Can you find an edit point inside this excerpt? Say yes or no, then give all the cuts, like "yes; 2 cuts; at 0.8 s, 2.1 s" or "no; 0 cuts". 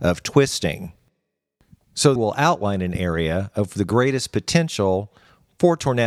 yes; 1 cut; at 2.2 s